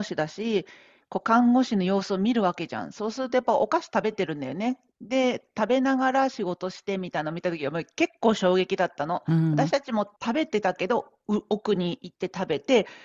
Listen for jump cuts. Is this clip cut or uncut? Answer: cut